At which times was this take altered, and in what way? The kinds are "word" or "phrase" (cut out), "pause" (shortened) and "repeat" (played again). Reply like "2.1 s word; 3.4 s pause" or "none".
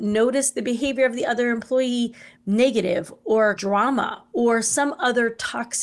2.4 s word; 3.6 s word